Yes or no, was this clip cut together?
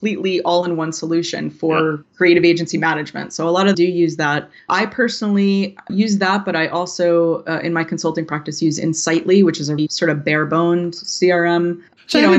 yes